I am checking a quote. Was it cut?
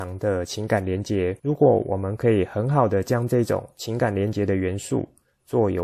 yes; 1 cut; at 1.4 s

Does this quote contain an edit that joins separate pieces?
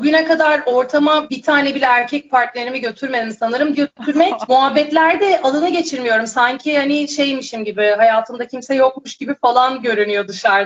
yes; 1 cut; at 3.7 s

